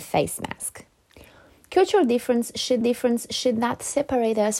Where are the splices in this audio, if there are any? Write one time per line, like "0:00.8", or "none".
0:02.8